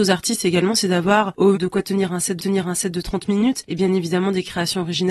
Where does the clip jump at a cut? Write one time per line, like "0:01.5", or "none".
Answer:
0:01.5
0:02.4